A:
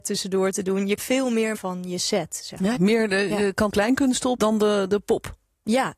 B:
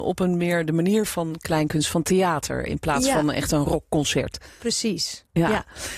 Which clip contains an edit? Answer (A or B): A